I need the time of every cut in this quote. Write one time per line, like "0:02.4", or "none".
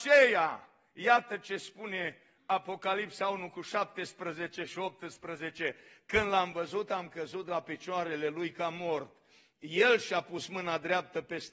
none